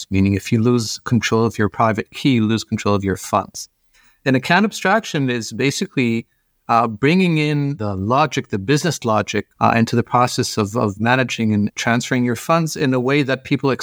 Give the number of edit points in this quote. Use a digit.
1